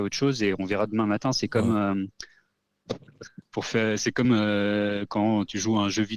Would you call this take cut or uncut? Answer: uncut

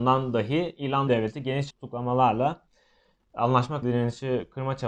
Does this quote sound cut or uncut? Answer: cut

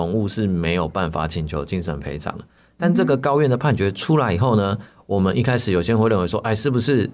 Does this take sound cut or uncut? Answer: uncut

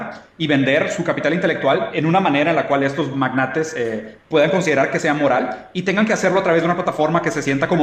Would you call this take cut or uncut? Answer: uncut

